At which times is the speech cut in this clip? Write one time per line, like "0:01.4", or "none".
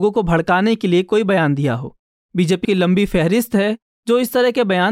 0:02.6